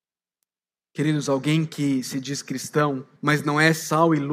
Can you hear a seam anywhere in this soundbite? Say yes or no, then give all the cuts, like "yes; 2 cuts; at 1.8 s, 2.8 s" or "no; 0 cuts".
yes; 1 cut; at 3.2 s